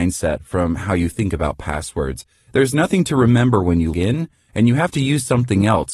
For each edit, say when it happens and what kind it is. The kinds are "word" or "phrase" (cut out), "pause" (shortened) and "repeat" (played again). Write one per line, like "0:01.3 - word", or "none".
0:03.9 - word